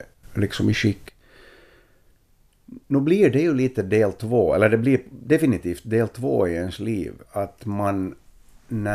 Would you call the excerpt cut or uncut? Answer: cut